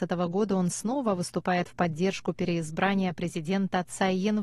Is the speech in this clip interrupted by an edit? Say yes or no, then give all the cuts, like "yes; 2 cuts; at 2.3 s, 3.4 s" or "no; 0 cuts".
no; 0 cuts